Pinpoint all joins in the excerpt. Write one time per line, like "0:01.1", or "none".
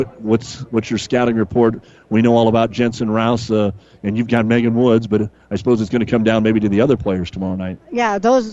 none